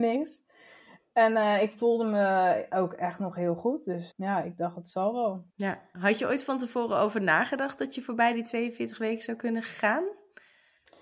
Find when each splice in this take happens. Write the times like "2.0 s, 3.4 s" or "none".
4.1 s, 5.5 s